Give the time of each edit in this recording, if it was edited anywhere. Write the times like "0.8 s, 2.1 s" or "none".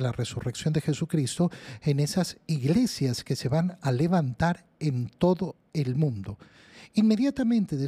none